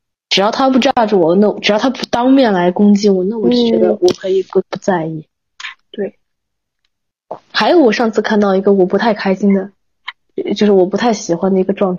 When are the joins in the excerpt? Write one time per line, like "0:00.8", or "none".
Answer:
0:04.6
0:07.4